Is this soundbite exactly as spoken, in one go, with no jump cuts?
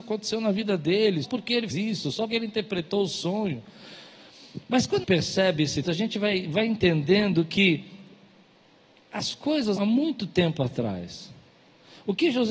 no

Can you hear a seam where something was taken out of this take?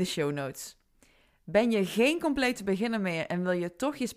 no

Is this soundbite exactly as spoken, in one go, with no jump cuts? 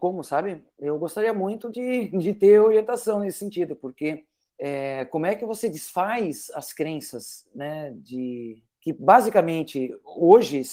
yes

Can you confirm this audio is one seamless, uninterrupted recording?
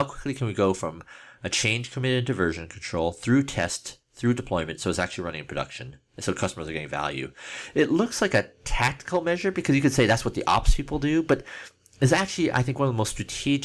yes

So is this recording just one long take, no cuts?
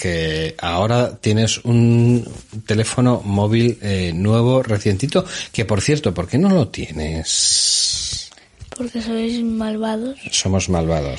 yes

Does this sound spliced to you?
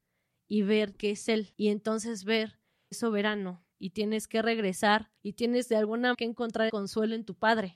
yes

